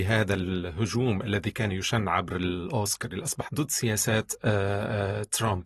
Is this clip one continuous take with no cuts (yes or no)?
no